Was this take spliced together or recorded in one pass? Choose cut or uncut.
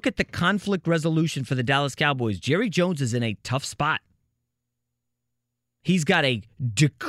uncut